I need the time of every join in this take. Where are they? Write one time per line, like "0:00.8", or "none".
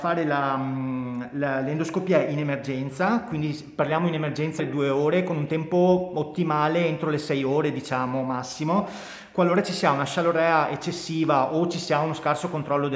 0:04.6

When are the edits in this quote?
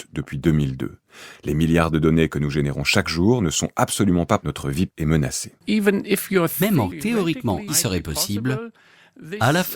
0:04.4
0:04.9
0:05.6
0:06.9
0:07.7

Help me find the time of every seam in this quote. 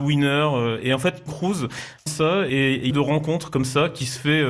0:01.3
0:02.1
0:02.9

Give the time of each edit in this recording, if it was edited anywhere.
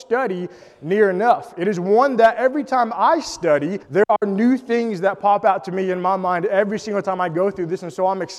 0:03.8

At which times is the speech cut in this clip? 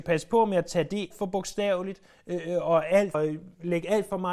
0:01.1
0:03.1

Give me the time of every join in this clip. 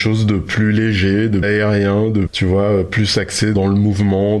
0:01.4
0:02.3

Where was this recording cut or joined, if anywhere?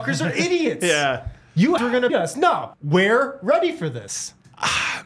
0:01.8
0:02.1
0:02.7

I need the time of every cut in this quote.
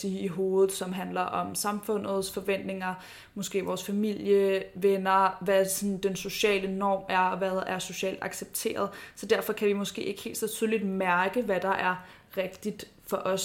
none

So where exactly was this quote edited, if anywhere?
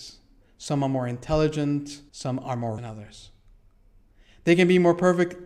0:02.1
0:02.8

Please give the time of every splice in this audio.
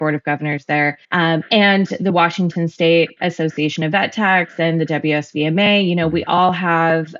0:01.0

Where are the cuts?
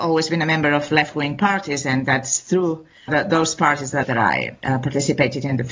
0:03.1
0:04.0

